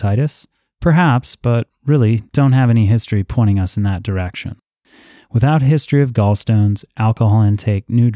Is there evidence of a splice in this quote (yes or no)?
no